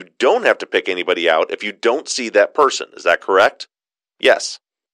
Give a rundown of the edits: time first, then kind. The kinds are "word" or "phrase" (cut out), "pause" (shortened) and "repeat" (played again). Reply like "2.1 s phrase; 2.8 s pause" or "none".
none